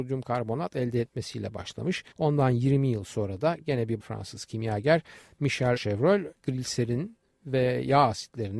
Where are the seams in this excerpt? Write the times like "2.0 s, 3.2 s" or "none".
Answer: 2.1 s, 4.0 s, 5.8 s, 6.3 s